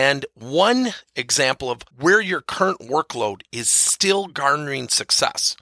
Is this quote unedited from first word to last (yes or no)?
no